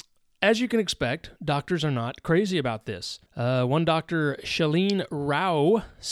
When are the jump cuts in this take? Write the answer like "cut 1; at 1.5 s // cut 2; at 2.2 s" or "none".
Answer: cut 1; at 3.3 s